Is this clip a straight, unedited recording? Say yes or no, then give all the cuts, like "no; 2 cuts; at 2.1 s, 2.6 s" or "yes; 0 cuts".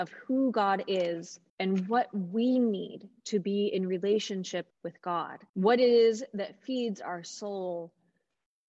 no; 3 cuts; at 1.5 s, 4.7 s, 5.5 s